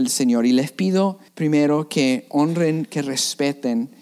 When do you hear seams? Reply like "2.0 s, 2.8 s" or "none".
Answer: 1.3 s